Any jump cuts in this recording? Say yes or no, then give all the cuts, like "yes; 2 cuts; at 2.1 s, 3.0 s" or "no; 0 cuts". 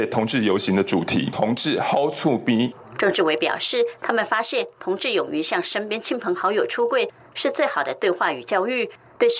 no; 0 cuts